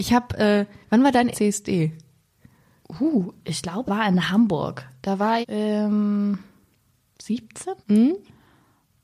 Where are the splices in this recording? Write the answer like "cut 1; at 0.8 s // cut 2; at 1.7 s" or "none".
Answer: cut 1; at 1.3 s // cut 2; at 3.9 s // cut 3; at 5.4 s // cut 4; at 7.8 s